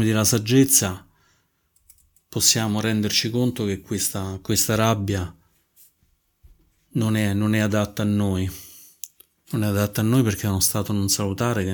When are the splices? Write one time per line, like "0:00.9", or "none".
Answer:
none

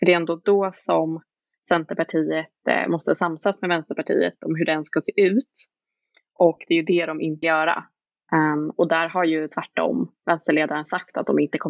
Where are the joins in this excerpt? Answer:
0:07.4
0:10.2

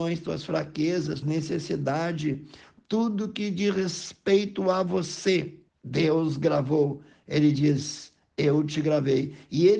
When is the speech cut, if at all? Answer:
0:01.2
0:05.7

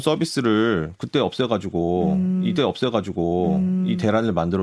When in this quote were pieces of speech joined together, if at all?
0:02.6

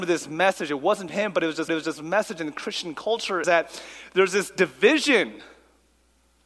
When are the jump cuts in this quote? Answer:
0:01.1
0:01.7
0:03.4

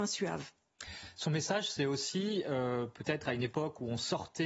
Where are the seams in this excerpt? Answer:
none

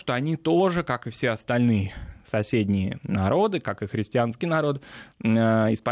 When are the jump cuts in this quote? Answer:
0:04.4

